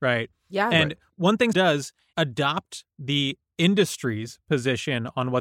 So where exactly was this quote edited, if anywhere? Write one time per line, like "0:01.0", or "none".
0:01.5
0:02.1

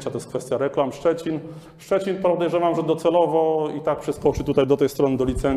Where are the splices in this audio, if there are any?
none

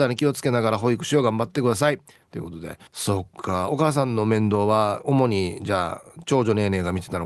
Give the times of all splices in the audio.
0:02.9

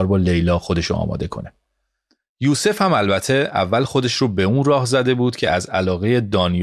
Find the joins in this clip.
none

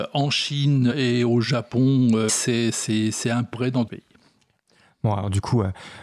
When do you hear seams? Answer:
0:00.9
0:02.3
0:03.5
0:03.9

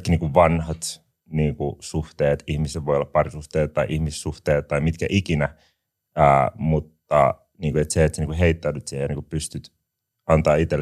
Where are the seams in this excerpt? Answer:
none

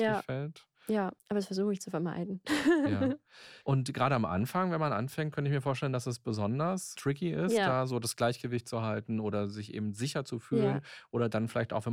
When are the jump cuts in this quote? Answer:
0:01.2
0:03.6

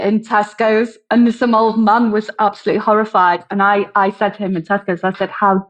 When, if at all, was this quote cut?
none

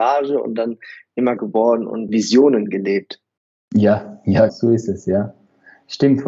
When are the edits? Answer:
0:01.4
0:02.1
0:03.4
0:04.5

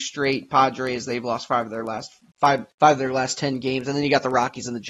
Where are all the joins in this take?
0:02.7

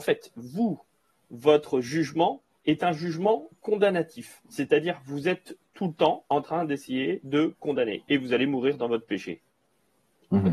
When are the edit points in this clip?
none

